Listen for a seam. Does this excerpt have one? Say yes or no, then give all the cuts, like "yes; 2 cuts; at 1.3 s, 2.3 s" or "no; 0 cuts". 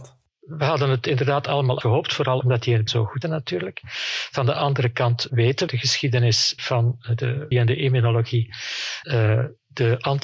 yes; 9 cuts; at 1.8 s, 2.4 s, 2.9 s, 3.2 s, 5.3 s, 5.7 s, 6.6 s, 7.5 s, 9.0 s